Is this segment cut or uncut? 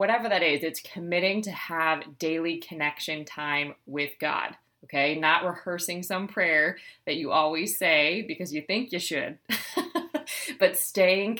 uncut